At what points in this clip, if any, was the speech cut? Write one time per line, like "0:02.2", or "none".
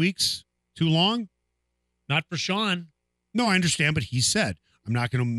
none